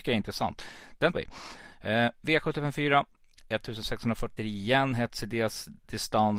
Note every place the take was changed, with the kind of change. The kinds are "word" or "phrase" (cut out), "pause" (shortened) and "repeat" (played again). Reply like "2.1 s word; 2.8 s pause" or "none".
1.1 s word; 4.4 s word

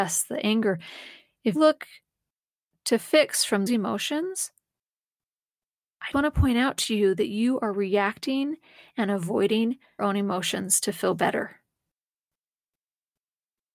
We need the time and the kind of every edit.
1.5 s word; 3.7 s word; 6.1 s word; 10.0 s word

